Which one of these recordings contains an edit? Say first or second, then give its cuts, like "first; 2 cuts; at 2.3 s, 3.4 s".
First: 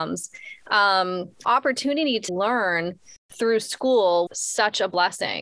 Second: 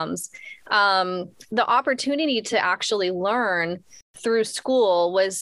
first; 3 cuts; at 1.4 s, 2.3 s, 4.3 s